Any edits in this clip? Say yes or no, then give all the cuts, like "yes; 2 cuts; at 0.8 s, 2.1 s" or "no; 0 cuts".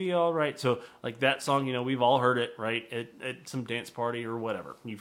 no; 0 cuts